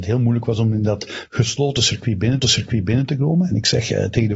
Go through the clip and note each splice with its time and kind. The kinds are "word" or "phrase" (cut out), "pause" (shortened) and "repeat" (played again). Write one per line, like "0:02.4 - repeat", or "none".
0:02.4 - repeat